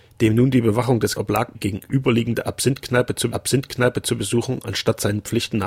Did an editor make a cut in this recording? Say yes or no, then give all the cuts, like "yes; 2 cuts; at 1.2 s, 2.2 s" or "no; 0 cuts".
yes; 3 cuts; at 1.2 s, 1.5 s, 3.3 s